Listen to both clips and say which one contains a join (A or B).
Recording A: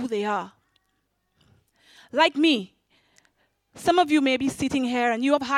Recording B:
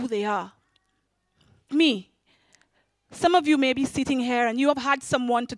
B